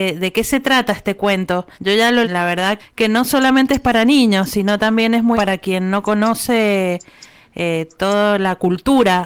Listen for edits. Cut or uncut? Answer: cut